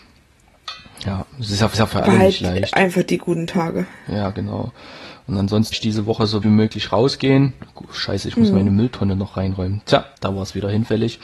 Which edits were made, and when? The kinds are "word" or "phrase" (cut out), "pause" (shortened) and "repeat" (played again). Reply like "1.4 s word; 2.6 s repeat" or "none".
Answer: 1.7 s repeat; 5.7 s word; 6.4 s word; 10.1 s pause

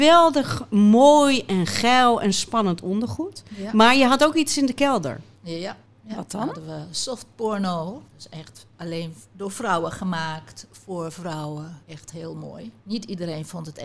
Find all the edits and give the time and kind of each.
5.9 s pause; 8.1 s pause; 8.7 s pause; 11.8 s pause; 12.8 s pause

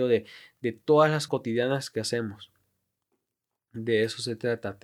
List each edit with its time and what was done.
1.3 s word

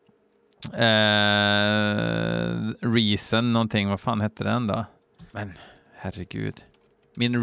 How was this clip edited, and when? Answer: 5.3 s pause

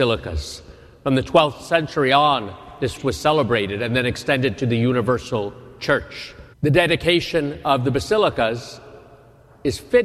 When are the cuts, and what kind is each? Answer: 3.0 s word; 6.5 s pause

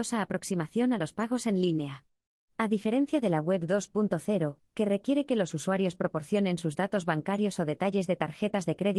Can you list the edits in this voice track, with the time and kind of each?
none

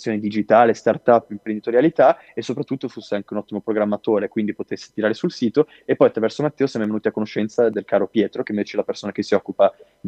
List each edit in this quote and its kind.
none

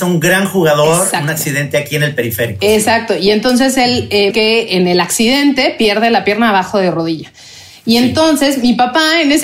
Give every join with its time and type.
4.3 s phrase

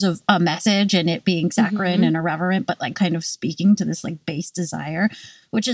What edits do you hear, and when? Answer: 2.9 s word

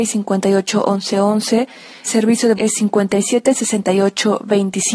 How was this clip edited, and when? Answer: 2.1 s word; 2.6 s word

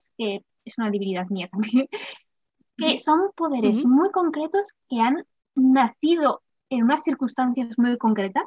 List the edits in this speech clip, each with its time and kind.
none

